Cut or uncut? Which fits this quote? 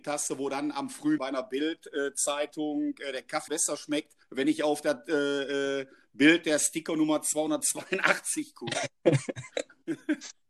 cut